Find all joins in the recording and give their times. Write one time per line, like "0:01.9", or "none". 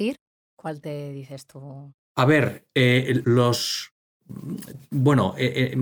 0:02.0
0:03.2